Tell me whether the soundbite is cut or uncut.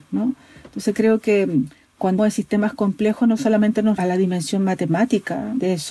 cut